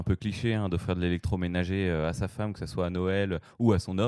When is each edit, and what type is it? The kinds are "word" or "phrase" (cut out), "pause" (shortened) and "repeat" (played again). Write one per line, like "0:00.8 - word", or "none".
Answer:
none